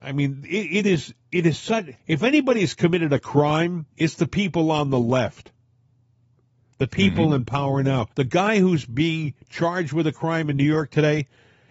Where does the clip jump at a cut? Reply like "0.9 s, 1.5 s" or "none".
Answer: 1.2 s, 2.0 s, 3.9 s, 8.1 s

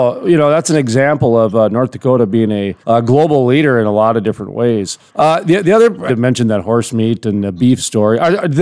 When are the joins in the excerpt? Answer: 2.8 s, 5.1 s, 6.1 s

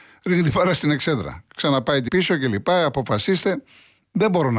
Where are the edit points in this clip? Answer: 2.1 s

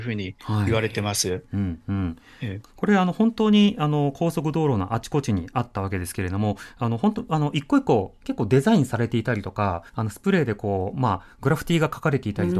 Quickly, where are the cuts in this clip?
9.9 s

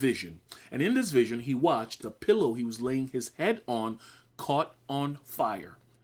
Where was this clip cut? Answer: 2.0 s

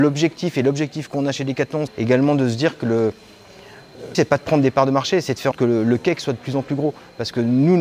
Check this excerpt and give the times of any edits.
1.9 s, 4.1 s, 5.5 s

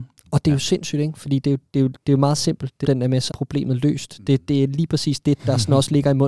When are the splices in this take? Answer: 2.8 s, 3.3 s

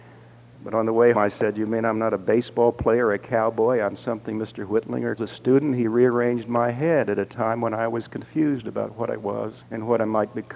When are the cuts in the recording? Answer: 1.1 s, 5.2 s, 9.6 s

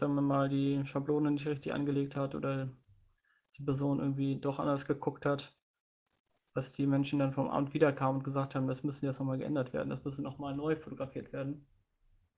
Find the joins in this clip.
none

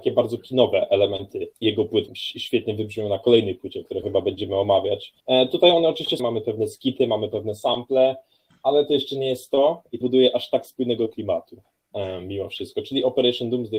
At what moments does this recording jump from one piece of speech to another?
1.5 s, 2.1 s, 4.0 s, 5.2 s, 6.2 s, 10.0 s

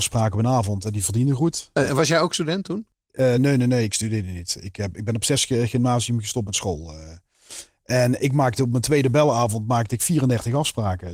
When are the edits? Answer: none

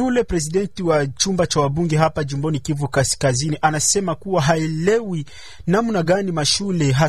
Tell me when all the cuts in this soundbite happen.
none

